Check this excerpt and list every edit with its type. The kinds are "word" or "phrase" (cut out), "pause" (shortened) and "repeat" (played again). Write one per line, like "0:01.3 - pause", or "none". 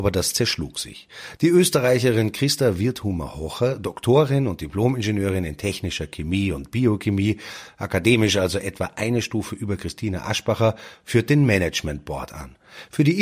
none